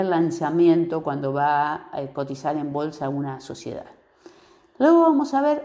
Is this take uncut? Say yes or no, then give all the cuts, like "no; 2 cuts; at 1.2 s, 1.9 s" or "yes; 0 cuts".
yes; 0 cuts